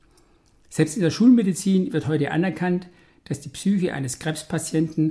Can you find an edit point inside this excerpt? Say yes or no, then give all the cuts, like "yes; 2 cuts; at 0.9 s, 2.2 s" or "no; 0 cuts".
no; 0 cuts